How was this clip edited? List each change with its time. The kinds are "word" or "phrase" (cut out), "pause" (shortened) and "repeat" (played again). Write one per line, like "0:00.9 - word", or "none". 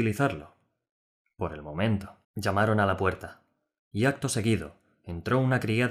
0:02.2 - pause